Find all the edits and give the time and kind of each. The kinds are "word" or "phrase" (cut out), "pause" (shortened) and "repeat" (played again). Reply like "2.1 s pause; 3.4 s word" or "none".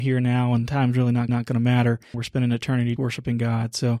1.3 s repeat; 2.1 s word; 3.0 s word